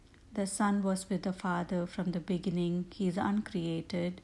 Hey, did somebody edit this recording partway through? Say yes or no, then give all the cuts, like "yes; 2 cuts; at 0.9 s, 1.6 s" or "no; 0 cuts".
no; 0 cuts